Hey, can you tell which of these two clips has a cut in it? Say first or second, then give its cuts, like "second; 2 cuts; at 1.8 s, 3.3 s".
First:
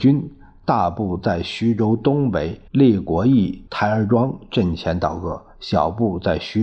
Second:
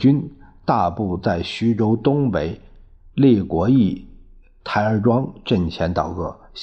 first; 2 cuts; at 2.7 s, 3.7 s